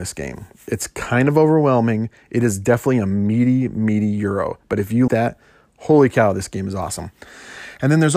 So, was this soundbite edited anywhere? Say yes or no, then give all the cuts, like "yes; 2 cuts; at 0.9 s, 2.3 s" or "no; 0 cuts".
yes; 1 cut; at 5.1 s